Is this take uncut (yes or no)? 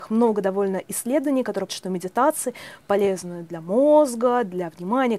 no